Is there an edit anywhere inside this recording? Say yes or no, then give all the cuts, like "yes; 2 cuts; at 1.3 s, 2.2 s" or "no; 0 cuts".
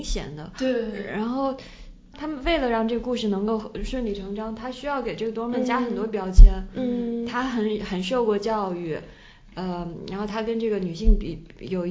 no; 0 cuts